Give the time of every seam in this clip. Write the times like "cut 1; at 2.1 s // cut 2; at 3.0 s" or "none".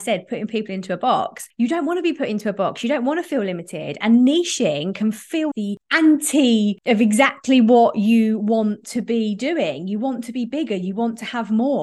cut 1; at 5.5 s